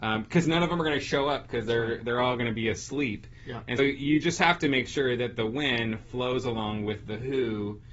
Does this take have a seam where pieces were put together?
yes; 1 cut; at 3.8 s

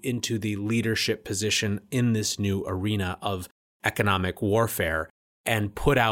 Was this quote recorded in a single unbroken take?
yes; 0 cuts

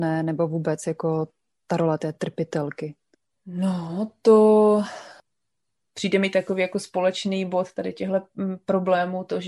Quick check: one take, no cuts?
yes; 0 cuts

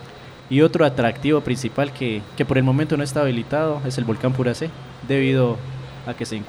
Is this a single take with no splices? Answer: yes; 0 cuts

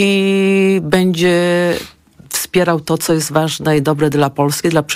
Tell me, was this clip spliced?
no; 0 cuts

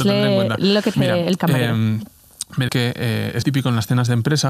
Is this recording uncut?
no; 4 cuts; at 0.9 s, 1.4 s, 2.7 s, 3.4 s

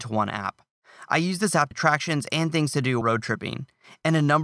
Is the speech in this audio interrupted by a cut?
yes; 2 cuts; at 1.7 s, 3.0 s

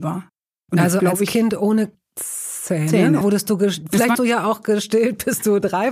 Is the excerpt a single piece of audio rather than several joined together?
no; 3 cuts; at 1.0 s, 3.2 s, 4.1 s

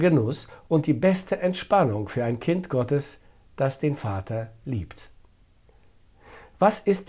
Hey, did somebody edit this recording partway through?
no; 0 cuts

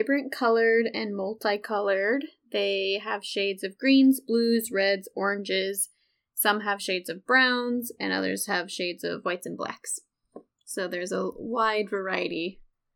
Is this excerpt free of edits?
yes; 0 cuts

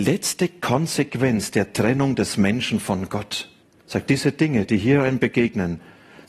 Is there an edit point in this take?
yes; 1 cut; at 3.6 s

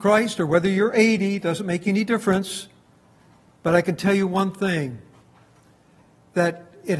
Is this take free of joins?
yes; 0 cuts

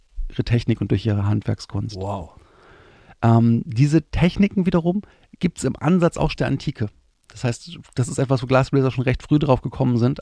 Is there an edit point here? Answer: yes; 2 cuts; at 5.3 s, 6.3 s

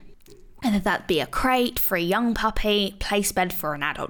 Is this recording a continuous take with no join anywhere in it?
yes; 0 cuts

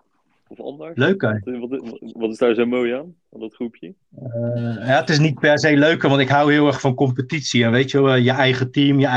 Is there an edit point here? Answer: no; 0 cuts

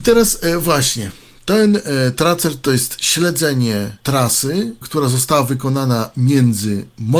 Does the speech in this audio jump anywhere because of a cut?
no; 0 cuts

